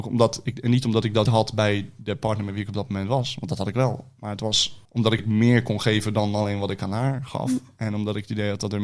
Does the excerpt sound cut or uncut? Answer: cut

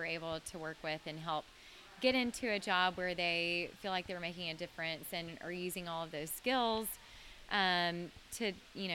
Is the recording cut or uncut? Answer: uncut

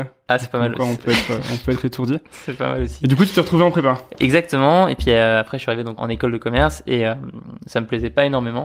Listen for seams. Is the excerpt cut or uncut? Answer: cut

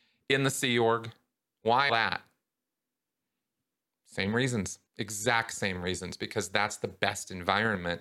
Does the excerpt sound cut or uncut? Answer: cut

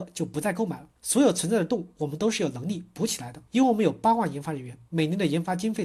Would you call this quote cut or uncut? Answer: cut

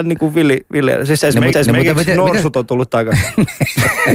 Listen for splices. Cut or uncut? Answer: cut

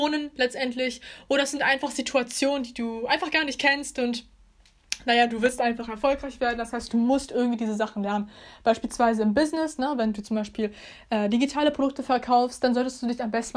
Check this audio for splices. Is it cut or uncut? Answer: uncut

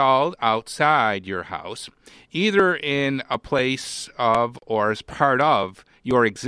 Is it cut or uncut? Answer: uncut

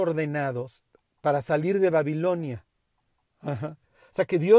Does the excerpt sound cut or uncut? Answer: uncut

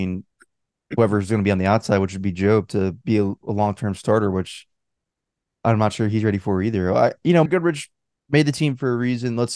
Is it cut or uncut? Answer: cut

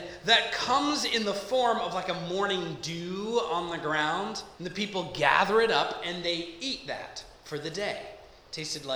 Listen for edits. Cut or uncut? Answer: cut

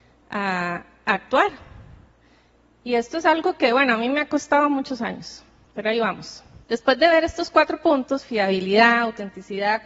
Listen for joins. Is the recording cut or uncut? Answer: cut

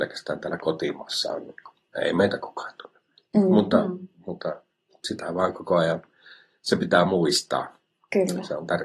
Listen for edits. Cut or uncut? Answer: uncut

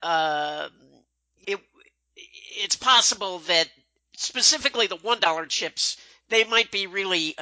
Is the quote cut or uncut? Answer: cut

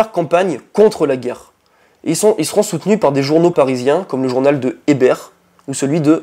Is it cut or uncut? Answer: cut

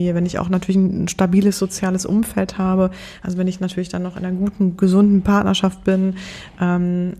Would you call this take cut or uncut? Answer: uncut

